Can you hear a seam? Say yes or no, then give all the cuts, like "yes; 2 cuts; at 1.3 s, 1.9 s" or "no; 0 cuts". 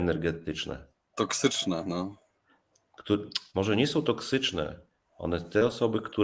no; 0 cuts